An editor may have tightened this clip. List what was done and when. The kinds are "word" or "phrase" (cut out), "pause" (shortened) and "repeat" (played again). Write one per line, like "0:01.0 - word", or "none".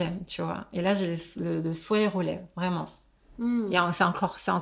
none

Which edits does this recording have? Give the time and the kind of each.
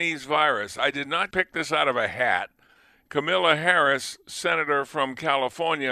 0:01.3 - word

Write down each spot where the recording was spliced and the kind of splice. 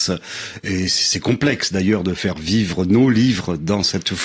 none

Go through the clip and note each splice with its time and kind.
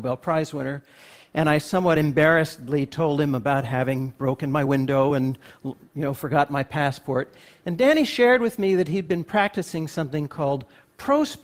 none

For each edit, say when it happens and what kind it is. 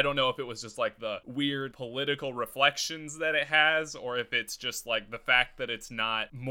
0:01.7 - word

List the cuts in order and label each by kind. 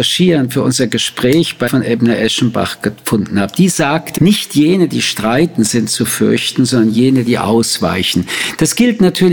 0:01.7 - word
0:04.2 - word

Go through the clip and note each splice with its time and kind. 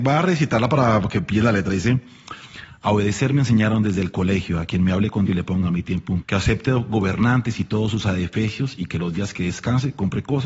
0:05.3 - word
0:06.2 - word

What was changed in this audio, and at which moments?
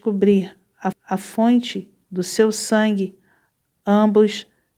0:00.9 - repeat

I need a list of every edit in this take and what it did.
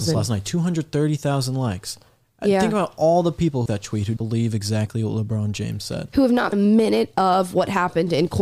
0:03.7 - word
0:04.2 - word
0:06.5 - word

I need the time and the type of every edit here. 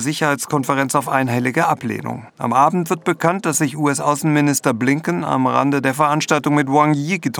0:02.3 - pause

